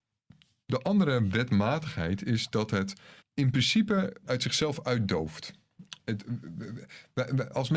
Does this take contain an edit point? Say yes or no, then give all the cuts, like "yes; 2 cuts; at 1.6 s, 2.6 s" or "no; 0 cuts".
yes; 2 cuts; at 3.2 s, 4.2 s